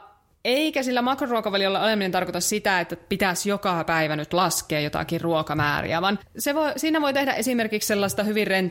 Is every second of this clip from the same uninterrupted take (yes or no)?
yes